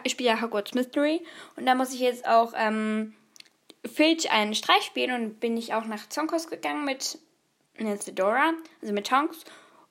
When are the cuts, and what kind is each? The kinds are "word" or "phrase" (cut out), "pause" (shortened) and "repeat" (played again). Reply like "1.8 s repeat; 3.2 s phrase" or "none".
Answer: none